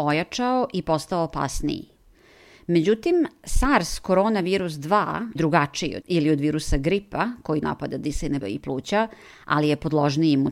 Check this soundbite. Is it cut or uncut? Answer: cut